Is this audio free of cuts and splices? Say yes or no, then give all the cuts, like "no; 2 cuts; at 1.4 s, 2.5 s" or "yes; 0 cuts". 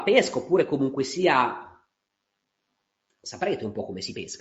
yes; 0 cuts